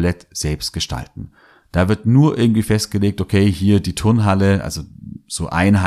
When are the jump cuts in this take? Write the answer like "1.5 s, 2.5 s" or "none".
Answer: none